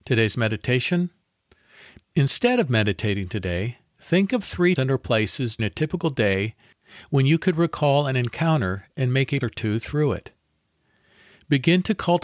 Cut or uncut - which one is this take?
cut